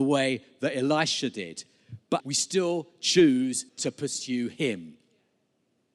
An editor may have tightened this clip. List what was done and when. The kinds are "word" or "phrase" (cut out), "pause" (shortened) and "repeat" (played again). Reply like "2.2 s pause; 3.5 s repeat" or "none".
2.2 s word; 3.7 s pause